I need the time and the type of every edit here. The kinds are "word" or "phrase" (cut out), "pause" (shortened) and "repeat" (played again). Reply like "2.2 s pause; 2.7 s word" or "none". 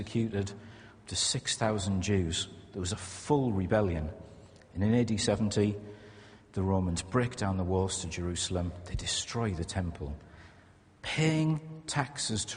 none